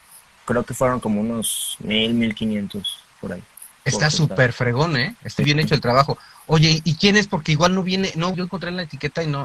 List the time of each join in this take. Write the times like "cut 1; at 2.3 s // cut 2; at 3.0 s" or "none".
cut 1; at 5.4 s // cut 2; at 8.3 s